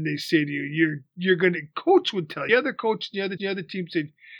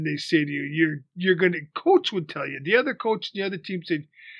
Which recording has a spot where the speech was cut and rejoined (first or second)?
first